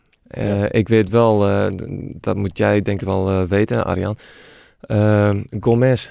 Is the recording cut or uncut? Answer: uncut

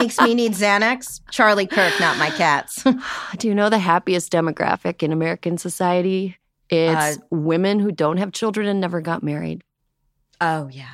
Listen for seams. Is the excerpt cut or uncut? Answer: uncut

